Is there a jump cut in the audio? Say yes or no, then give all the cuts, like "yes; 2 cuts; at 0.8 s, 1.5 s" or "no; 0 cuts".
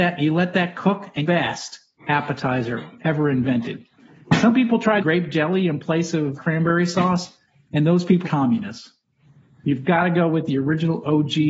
yes; 4 cuts; at 1.2 s, 5.0 s, 6.3 s, 8.2 s